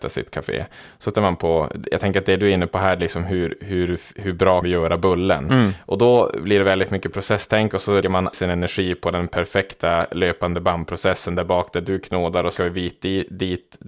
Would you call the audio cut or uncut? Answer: cut